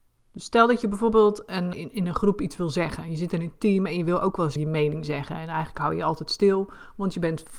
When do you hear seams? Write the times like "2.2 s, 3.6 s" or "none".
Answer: 1.7 s, 4.6 s